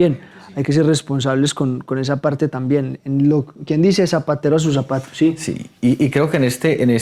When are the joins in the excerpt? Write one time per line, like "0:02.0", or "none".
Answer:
0:03.6